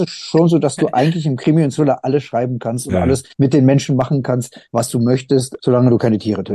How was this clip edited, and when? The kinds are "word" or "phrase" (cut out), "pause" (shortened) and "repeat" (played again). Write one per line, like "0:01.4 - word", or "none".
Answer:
0:03.3 - pause
0:04.7 - pause
0:05.6 - word